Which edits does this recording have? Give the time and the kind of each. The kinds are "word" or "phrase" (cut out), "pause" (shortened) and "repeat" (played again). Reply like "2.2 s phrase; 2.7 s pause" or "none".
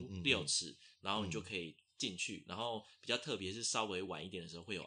0.9 s pause